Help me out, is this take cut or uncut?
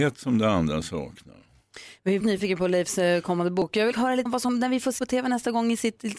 cut